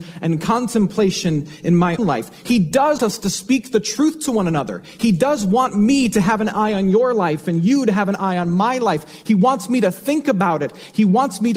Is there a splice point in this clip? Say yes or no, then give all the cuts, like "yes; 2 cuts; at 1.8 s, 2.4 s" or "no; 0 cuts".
yes; 2 cuts; at 2.0 s, 3.0 s